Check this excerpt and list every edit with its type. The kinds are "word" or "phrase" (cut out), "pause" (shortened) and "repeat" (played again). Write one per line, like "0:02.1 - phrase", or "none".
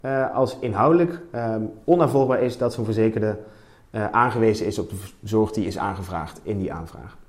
none